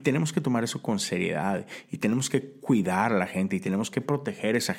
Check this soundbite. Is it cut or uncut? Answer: uncut